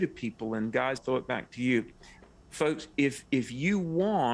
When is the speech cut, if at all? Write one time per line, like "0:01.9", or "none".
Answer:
0:01.0